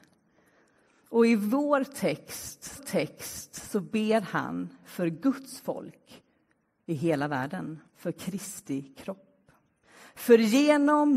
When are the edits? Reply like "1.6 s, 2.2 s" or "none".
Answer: 2.8 s, 7.9 s